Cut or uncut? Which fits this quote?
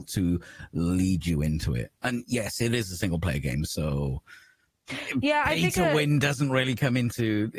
uncut